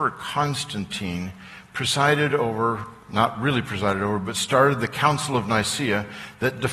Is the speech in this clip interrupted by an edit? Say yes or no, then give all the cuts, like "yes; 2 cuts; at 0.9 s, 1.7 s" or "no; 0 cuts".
no; 0 cuts